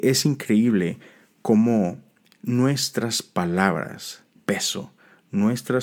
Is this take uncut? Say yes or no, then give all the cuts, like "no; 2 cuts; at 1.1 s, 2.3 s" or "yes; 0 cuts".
no; 1 cut; at 4.4 s